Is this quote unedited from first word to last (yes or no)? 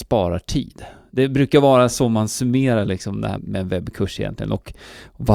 no